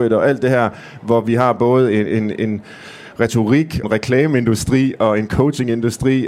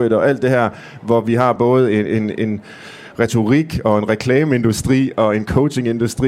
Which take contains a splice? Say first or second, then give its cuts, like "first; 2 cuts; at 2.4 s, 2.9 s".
first; 1 cut; at 3.8 s